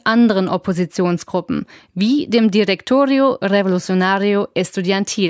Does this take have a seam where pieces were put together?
no; 0 cuts

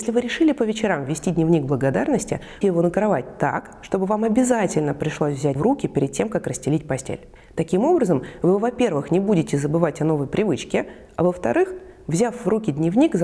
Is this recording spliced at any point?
yes; 3 cuts; at 2.6 s, 5.6 s, 7.4 s

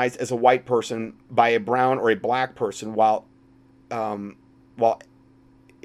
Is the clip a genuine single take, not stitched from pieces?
yes; 0 cuts

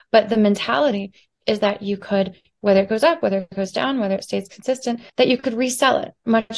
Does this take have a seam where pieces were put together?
yes; 1 cut; at 5.1 s

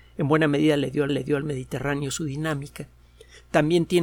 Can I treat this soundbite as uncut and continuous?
no; 1 cut; at 1.1 s

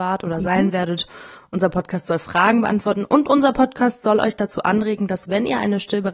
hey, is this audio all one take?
yes; 0 cuts

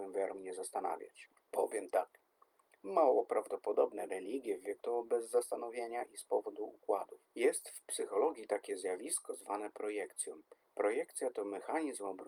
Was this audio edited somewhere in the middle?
yes; 3 cuts; at 4.1 s, 4.8 s, 7.2 s

